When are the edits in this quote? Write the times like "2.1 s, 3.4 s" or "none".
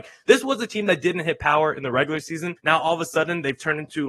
2.6 s